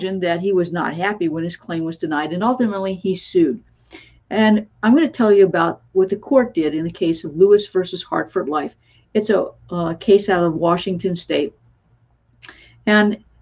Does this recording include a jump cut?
no; 0 cuts

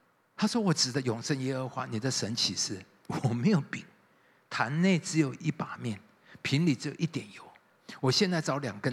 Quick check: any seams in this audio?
no; 0 cuts

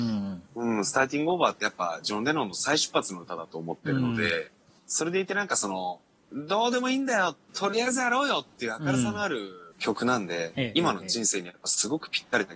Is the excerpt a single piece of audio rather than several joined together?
no; 3 cuts; at 4.7 s, 7.5 s, 9.7 s

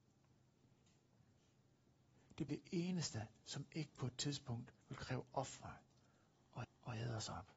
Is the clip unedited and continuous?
no; 3 cuts; at 2.5 s, 4.8 s, 6.6 s

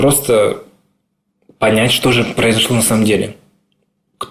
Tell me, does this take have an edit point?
no; 0 cuts

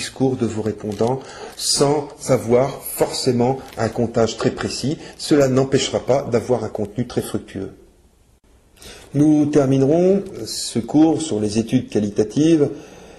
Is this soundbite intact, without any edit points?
yes; 0 cuts

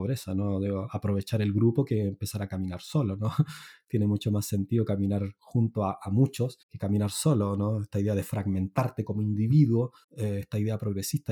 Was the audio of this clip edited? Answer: yes; 2 cuts; at 6.6 s, 10.0 s

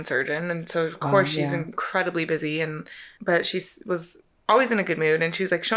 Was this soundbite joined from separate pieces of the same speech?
no; 0 cuts

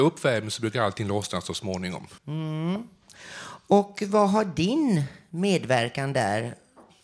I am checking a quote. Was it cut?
yes; 1 cut; at 2.2 s

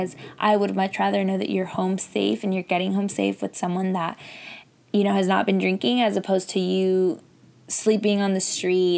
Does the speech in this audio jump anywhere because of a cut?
no; 0 cuts

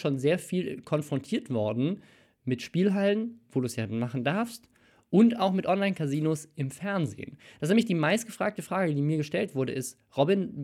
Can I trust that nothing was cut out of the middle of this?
yes; 0 cuts

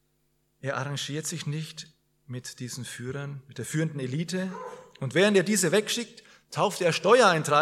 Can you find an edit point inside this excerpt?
no; 0 cuts

